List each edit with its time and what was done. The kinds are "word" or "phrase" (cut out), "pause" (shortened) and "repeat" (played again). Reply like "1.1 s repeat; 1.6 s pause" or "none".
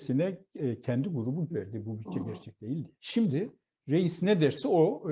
1.5 s phrase; 3.0 s pause